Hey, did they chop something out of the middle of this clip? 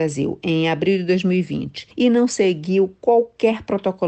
no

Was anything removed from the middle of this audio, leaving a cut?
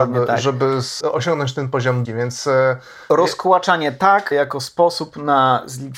yes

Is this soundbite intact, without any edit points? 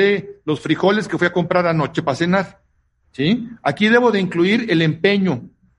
yes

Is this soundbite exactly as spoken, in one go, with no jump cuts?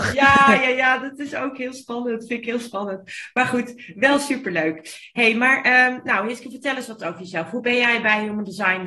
yes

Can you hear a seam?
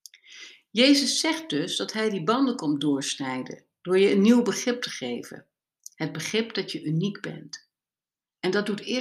no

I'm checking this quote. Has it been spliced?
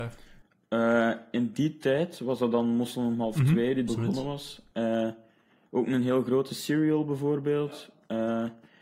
yes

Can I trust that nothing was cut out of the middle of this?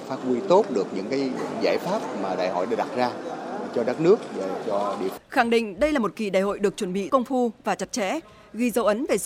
no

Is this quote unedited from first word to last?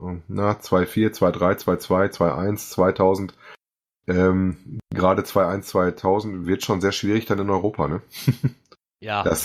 yes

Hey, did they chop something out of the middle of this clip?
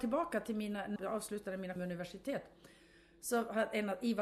yes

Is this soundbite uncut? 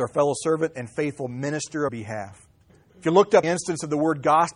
no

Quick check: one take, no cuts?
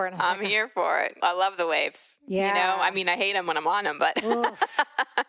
yes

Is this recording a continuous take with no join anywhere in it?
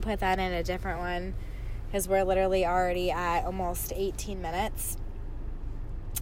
yes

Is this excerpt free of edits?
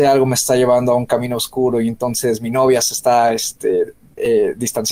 yes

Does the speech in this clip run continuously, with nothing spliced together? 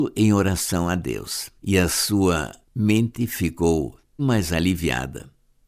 no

